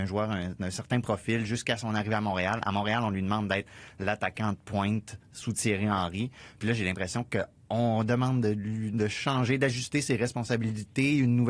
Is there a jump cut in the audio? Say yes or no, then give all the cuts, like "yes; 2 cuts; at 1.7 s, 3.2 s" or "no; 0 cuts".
no; 0 cuts